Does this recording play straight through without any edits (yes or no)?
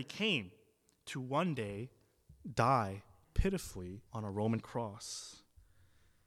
no